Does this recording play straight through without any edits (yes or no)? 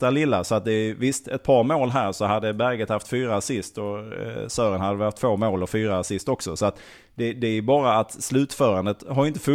yes